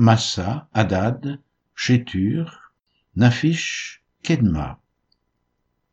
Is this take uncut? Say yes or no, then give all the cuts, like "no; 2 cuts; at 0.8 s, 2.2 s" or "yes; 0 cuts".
no; 2 cuts; at 1.7 s, 4.2 s